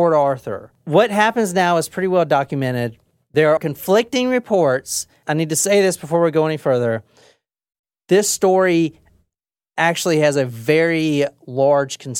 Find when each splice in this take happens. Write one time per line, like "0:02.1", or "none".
0:03.6